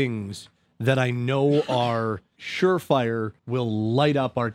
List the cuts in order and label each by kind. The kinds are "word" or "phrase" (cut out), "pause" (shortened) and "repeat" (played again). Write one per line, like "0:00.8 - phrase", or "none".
0:02.4 - word
0:03.4 - pause